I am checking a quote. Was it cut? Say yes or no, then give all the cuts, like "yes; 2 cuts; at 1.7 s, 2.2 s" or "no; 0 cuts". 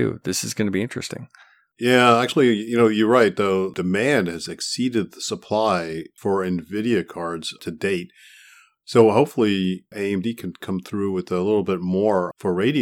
no; 0 cuts